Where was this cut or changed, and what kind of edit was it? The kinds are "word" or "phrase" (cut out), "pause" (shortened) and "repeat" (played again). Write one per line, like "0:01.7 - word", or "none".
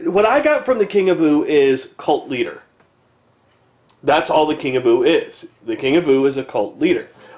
none